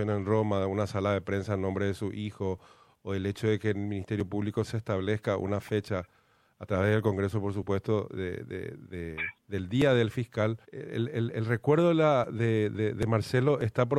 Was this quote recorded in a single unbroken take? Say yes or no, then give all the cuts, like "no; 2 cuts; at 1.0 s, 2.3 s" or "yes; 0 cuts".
no; 1 cut; at 10.6 s